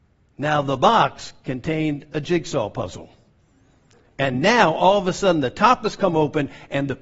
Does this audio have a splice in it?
no; 0 cuts

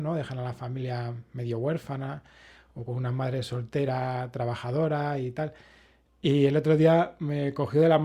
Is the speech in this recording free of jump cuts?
yes; 0 cuts

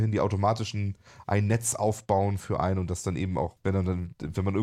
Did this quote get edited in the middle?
yes; 1 cut; at 3.6 s

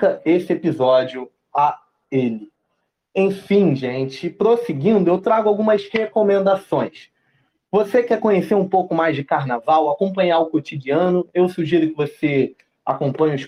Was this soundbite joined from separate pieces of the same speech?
no; 0 cuts

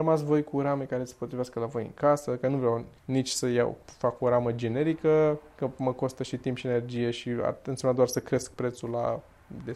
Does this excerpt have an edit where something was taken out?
yes; 1 cut; at 3.0 s

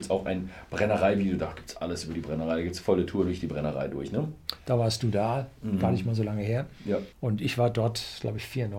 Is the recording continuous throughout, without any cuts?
no; 1 cut; at 7.1 s

